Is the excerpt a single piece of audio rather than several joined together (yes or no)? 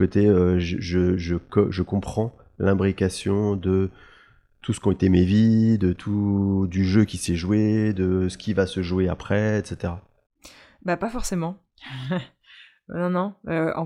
yes